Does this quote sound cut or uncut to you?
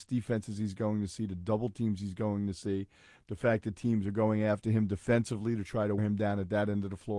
cut